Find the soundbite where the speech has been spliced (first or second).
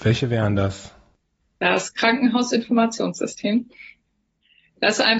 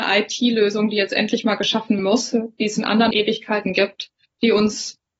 second